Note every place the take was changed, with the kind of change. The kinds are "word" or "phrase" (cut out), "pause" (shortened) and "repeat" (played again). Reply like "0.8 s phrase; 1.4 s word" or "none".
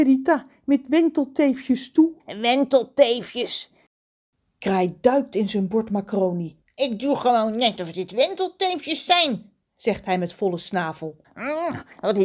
2.2 s pause; 6.6 s pause